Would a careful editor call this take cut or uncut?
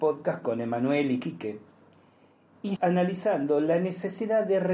cut